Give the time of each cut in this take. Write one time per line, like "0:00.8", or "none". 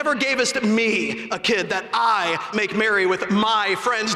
0:02.5